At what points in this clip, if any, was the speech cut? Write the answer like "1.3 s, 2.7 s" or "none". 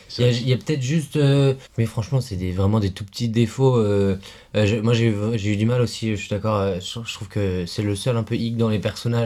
1.7 s

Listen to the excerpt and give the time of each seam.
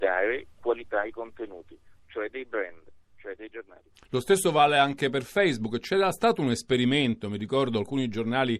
none

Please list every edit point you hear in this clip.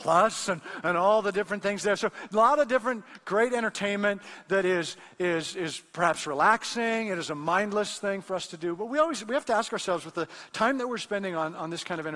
none

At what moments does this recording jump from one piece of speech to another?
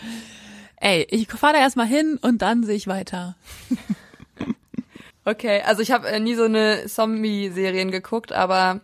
5.1 s

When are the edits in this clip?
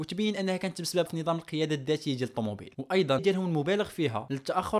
1.1 s, 3.2 s

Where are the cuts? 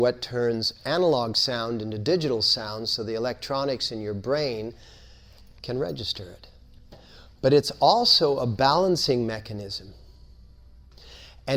none

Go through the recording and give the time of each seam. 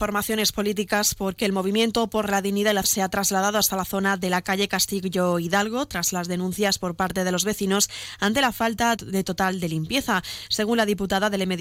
2.8 s, 9.0 s

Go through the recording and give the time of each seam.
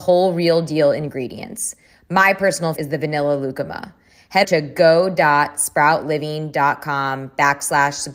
2.8 s, 4.4 s

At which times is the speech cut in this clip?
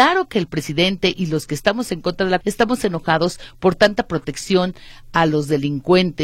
2.4 s

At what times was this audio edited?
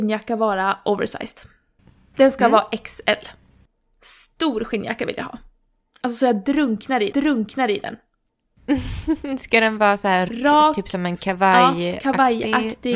7.1 s, 10.3 s

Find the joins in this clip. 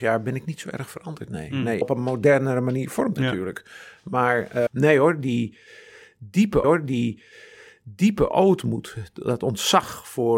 1.8 s, 3.2 s, 4.7 s, 6.6 s

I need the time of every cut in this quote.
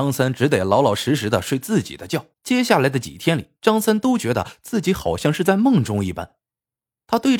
2.3 s, 3.6 s

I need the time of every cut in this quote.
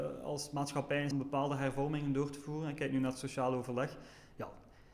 1.1 s

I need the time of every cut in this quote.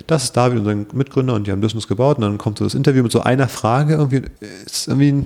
4.4 s

